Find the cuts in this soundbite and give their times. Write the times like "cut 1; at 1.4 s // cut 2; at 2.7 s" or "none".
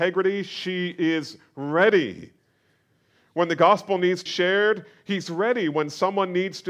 cut 1; at 4.3 s